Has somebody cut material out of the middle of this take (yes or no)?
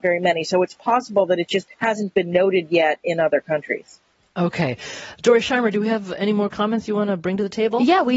yes